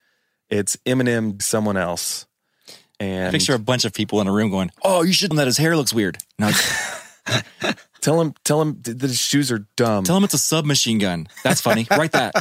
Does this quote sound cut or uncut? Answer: cut